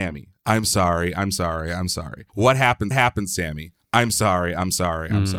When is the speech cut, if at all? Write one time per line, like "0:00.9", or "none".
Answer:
0:02.3
0:02.9